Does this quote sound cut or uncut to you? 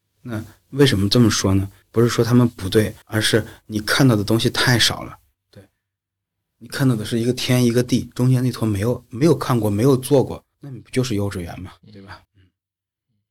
cut